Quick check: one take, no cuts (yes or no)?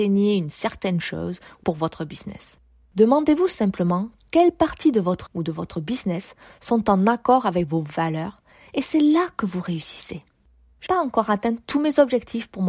no